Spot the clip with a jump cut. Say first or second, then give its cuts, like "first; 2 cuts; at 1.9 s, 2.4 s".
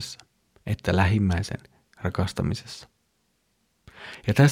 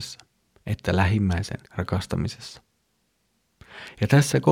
second; 1 cut; at 1.7 s